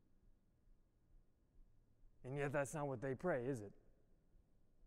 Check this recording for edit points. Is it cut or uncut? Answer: uncut